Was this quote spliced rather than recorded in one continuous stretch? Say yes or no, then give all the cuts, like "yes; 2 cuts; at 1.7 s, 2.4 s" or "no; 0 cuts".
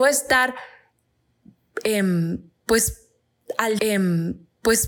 yes; 1 cut; at 3.8 s